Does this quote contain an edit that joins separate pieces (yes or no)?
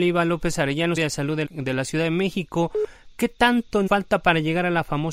yes